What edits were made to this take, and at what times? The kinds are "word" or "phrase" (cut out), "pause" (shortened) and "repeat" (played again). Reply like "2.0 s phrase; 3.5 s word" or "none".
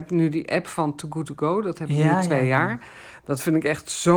none